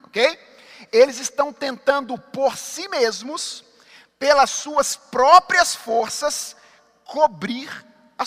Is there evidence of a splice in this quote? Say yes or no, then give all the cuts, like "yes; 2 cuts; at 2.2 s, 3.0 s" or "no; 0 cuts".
no; 0 cuts